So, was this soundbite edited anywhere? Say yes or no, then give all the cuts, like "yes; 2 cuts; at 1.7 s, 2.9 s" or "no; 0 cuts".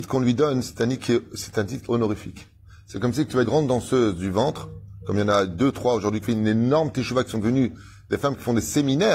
yes; 3 cuts; at 1.8 s, 3.4 s, 6.2 s